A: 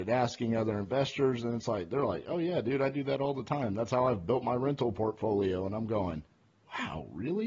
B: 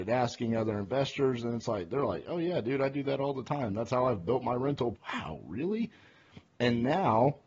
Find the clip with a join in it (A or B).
B